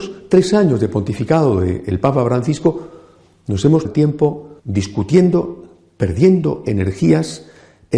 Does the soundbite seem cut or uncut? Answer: cut